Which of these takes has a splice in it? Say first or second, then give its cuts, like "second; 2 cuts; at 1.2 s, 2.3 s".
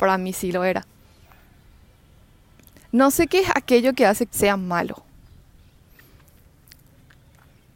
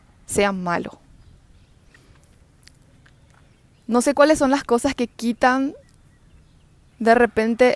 first; 1 cut; at 4.3 s